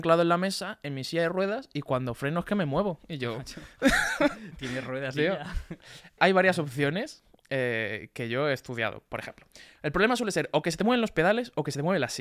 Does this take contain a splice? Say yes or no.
yes